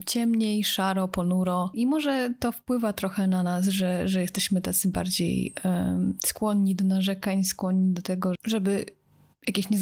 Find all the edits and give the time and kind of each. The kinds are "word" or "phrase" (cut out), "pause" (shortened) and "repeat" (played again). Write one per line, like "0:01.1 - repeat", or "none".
0:08.3 - word